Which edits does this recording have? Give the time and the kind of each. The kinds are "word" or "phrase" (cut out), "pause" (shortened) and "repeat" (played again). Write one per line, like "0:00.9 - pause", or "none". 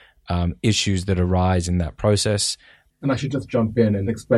none